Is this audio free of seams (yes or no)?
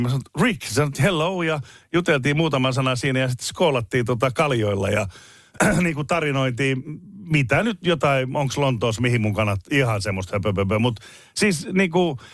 yes